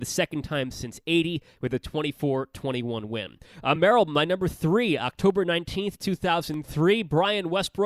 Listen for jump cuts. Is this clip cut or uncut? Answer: uncut